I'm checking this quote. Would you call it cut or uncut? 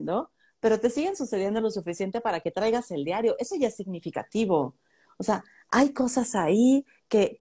uncut